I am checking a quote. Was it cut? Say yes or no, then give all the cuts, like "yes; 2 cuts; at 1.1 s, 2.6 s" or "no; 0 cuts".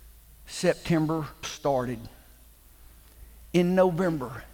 yes; 1 cut; at 1.4 s